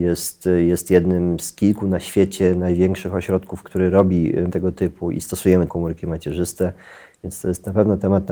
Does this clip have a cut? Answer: yes; 3 cuts; at 3.6 s, 4.5 s, 5.7 s

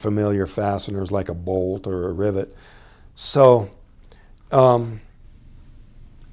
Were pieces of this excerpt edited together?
no; 0 cuts

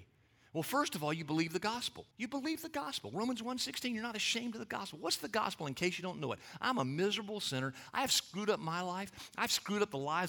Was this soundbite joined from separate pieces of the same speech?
yes; 1 cut; at 2.1 s

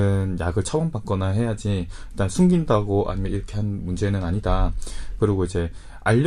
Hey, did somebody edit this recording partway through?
no; 0 cuts

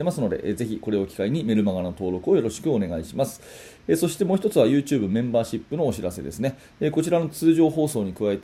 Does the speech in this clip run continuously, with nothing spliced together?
yes; 0 cuts

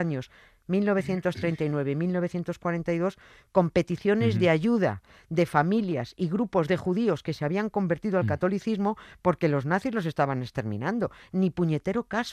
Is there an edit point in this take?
no; 0 cuts

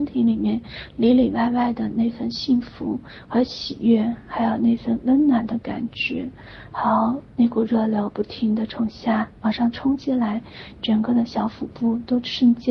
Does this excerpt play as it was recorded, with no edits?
no; 1 cut; at 7.3 s

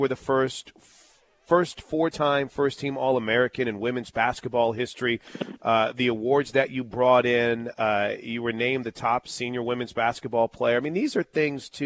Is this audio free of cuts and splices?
yes; 0 cuts

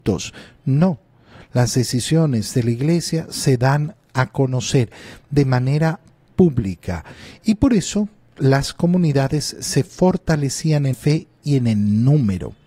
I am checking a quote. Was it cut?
yes; 1 cut; at 10.9 s

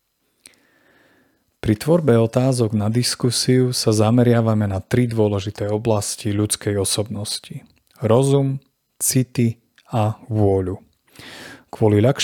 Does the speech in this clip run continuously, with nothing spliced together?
yes; 0 cuts

